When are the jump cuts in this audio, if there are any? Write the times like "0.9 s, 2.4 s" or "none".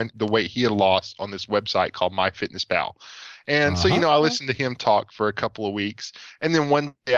none